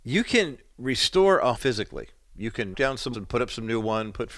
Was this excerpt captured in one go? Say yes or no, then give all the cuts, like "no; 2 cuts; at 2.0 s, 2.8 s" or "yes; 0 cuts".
no; 3 cuts; at 1.6 s, 2.7 s, 3.1 s